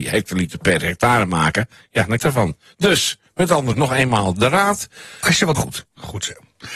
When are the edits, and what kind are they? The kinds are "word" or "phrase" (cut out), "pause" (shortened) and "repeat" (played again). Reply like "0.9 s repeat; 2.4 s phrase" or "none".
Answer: 2.2 s phrase; 3.3 s pause; 3.7 s word; 5.5 s phrase